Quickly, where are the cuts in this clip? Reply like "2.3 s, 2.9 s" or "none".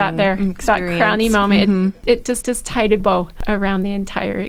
2.4 s, 3.0 s